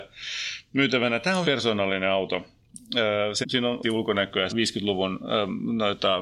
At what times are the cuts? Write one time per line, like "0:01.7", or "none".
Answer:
0:01.4
0:03.4
0:03.8
0:04.5